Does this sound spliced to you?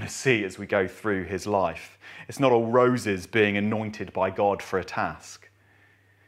no; 0 cuts

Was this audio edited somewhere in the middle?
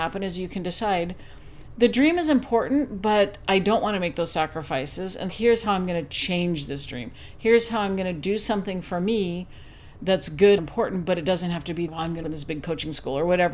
yes; 4 cuts; at 5.3 s, 10.6 s, 11.9 s, 12.2 s

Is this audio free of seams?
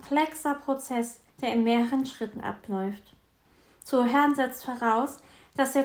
no; 1 cut; at 1.3 s

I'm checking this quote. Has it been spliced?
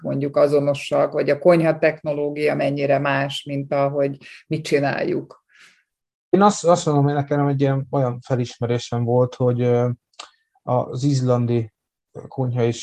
no; 0 cuts

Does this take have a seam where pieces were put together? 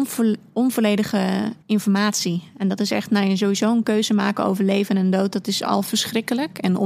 yes; 1 cut; at 1.6 s

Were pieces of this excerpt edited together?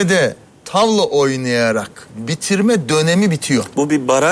no; 0 cuts

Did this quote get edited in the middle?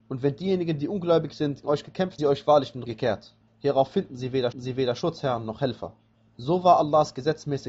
yes; 6 cuts; at 1.6 s, 2.2 s, 2.9 s, 3.4 s, 4.5 s, 6.1 s

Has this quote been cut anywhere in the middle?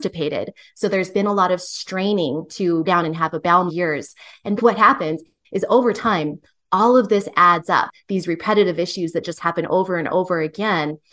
yes; 4 cuts; at 2.9 s, 3.7 s, 4.6 s, 5.4 s

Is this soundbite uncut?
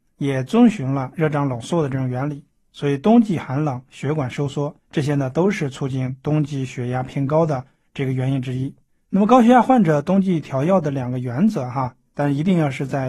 no; 2 cuts; at 4.8 s, 8.9 s

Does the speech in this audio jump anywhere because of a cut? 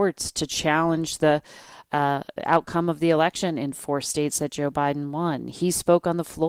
no; 0 cuts

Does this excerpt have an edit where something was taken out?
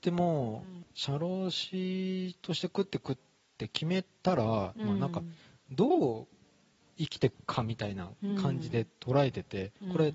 no; 0 cuts

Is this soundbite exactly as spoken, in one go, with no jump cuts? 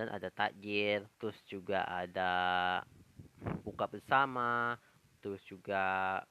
no; 1 cut; at 1.1 s

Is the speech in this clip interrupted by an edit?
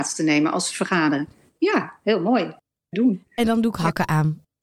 yes; 1 cut; at 2.9 s

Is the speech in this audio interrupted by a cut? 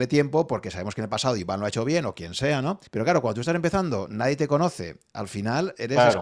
yes; 1 cut; at 2.9 s

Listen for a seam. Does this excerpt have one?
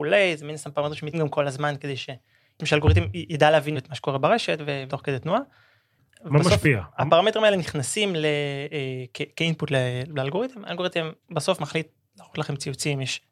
yes; 4 cuts; at 1.1 s, 3.7 s, 4.9 s, 11.2 s

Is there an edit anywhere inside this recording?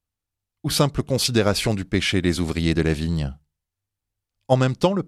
no; 0 cuts

